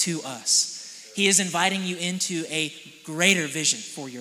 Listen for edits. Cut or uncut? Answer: uncut